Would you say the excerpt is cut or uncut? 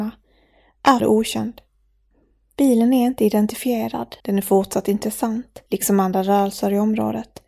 cut